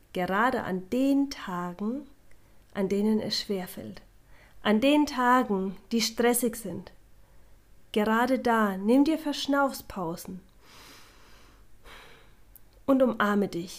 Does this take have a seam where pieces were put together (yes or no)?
no